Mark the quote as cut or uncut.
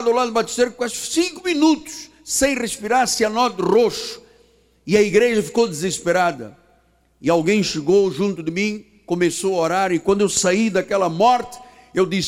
uncut